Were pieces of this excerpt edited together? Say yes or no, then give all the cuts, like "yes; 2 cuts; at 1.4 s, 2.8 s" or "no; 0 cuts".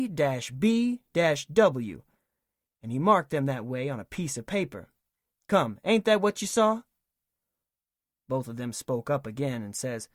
no; 0 cuts